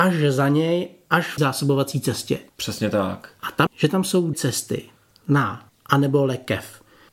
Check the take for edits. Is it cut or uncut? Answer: cut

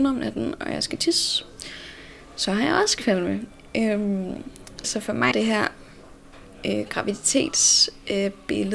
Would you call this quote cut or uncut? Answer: cut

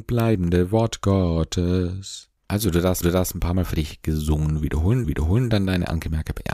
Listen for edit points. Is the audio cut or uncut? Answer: cut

